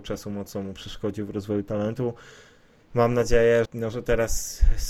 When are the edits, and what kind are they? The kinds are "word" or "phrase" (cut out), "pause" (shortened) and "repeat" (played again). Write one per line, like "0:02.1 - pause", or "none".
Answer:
0:03.6 - word